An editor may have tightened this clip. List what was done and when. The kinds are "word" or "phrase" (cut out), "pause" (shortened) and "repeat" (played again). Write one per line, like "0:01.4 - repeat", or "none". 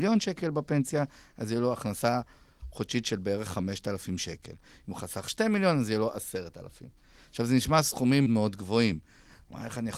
0:08.3 - word